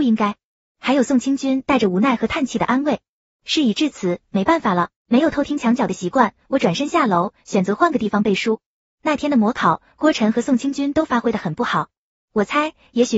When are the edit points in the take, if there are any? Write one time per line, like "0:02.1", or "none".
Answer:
0:05.0

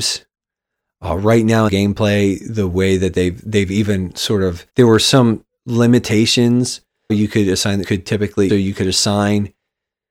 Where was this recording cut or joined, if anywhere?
0:01.7
0:04.7
0:07.1
0:07.8
0:08.5

